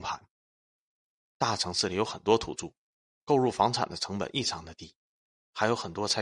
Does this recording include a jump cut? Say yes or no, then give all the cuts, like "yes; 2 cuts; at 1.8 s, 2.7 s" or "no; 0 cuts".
no; 0 cuts